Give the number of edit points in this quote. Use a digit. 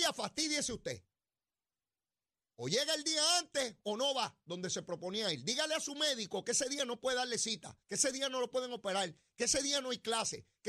1